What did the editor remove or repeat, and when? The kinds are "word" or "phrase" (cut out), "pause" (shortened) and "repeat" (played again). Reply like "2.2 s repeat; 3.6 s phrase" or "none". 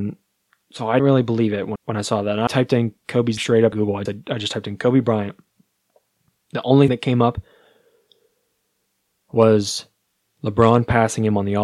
1.0 s word; 1.8 s word; 2.5 s word; 3.4 s word; 3.7 s word; 4.1 s word; 6.9 s word

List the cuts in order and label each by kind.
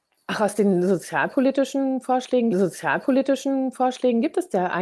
2.5 s repeat

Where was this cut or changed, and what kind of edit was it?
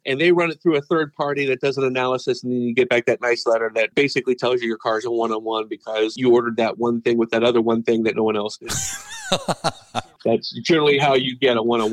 none

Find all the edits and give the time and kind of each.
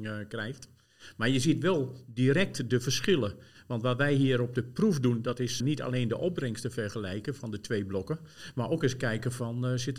5.6 s word

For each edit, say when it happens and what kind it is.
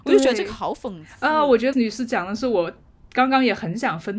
1.7 s word

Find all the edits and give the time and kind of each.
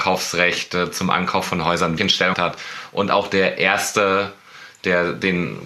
2.0 s word; 2.3 s word

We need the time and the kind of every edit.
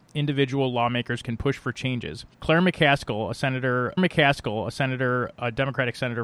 2.3 s pause; 4.0 s repeat

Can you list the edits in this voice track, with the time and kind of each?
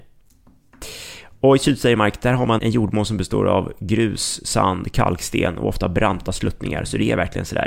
2.6 s word

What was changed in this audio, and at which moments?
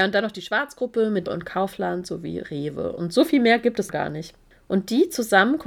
1.3 s word; 3.9 s word

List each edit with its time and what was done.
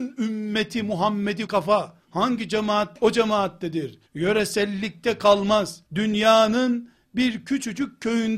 1.5 s word; 2.0 s pause; 3.0 s word; 4.1 s pause; 5.9 s pause

